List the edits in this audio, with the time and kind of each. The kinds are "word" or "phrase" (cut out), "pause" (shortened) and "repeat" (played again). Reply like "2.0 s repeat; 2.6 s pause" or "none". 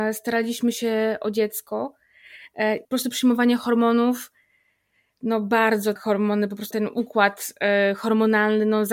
2.8 s word; 6.0 s word; 6.7 s word